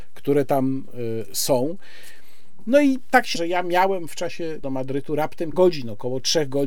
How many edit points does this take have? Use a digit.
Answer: 3